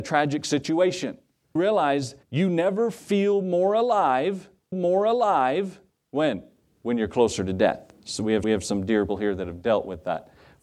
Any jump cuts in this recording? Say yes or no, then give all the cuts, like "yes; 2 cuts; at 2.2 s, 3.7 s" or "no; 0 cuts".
yes; 6 cuts; at 1.6 s, 2.2 s, 4.7 s, 8.0 s, 8.4 s, 9.1 s